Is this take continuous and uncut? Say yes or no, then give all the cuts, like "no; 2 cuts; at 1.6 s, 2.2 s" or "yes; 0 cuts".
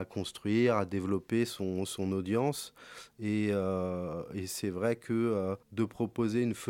no; 1 cut; at 5.6 s